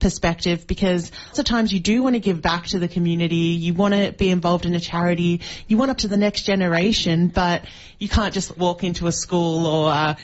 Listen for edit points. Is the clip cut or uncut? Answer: cut